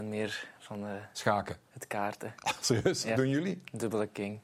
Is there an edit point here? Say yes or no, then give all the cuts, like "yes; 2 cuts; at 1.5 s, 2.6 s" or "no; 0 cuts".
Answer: yes; 1 cut; at 3.1 s